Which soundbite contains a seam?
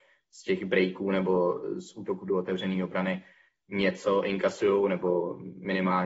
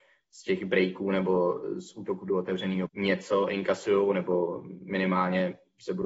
second; 1 cut; at 2.9 s

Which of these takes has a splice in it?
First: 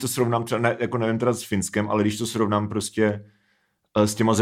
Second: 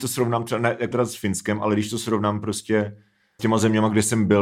second; 2 cuts; at 0.9 s, 3.4 s

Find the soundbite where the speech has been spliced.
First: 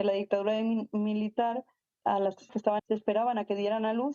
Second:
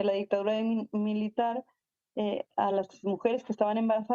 first; 3 cuts; at 2.0 s, 2.5 s, 2.8 s

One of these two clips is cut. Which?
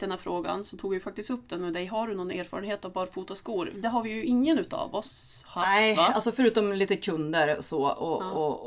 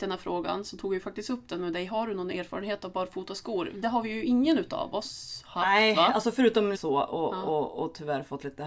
second; 1 cut; at 6.7 s

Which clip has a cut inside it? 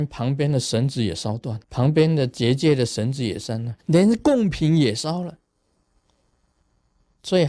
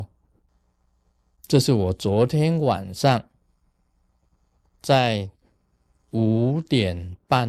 first; 2 cuts; at 1.6 s, 3.8 s

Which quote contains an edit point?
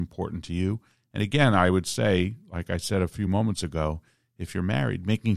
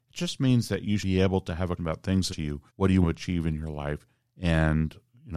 second; 5 cuts; at 1.0 s, 1.8 s, 2.3 s, 2.7 s, 3.0 s

